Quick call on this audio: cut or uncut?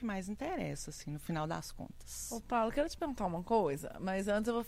uncut